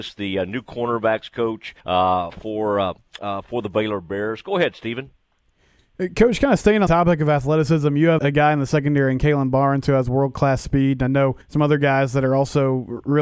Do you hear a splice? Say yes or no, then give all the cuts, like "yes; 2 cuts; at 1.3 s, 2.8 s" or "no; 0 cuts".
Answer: yes; 4 cuts; at 1.8 s, 6.9 s, 8.2 s, 11.4 s